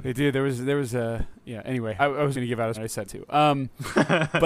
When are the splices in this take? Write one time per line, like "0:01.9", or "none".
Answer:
0:02.0
0:02.3
0:02.7
0:03.0